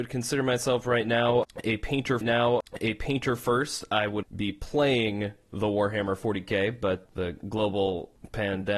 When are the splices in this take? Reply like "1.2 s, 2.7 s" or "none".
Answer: 2.2 s, 4.2 s, 7.0 s